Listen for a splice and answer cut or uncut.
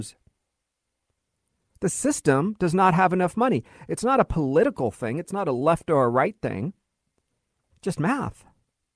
uncut